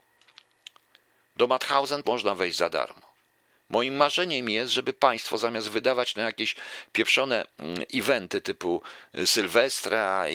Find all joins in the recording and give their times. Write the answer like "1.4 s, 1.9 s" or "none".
2.0 s

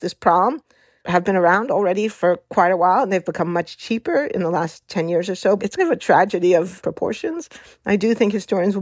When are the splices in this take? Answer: 5.8 s, 6.8 s

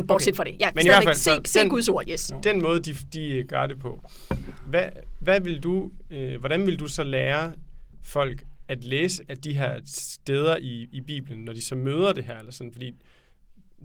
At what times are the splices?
none

